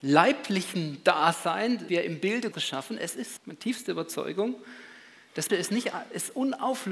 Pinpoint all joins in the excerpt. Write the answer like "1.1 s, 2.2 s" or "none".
1.9 s, 2.5 s, 3.4 s, 5.5 s